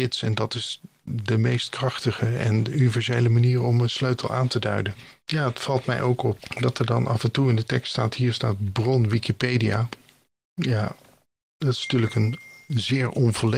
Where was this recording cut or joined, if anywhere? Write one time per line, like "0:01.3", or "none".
none